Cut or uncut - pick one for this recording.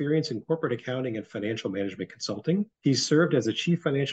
cut